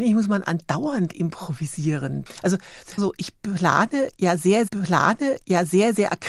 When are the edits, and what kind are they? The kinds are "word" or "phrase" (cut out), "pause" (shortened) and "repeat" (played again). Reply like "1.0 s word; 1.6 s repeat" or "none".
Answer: 3.0 s word; 4.7 s repeat